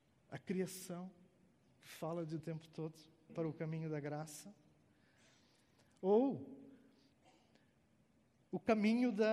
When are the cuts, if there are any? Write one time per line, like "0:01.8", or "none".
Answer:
0:02.4
0:03.3